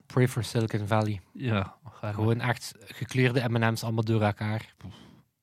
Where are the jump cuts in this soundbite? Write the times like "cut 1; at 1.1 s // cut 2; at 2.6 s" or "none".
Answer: cut 1; at 2.8 s